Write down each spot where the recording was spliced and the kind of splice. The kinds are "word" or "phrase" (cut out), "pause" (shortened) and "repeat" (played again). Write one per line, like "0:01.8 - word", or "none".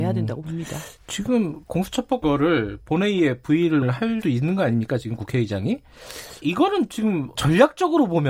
0:01.0 - pause
0:02.2 - word
0:03.8 - word
0:04.2 - word
0:06.4 - word
0:07.3 - word